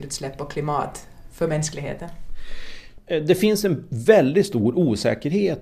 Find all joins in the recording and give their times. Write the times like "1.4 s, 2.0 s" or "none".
none